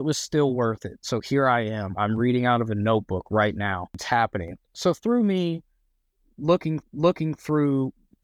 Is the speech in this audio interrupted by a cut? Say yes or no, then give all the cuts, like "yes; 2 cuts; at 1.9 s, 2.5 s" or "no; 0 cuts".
yes; 2 cuts; at 4.6 s, 6.8 s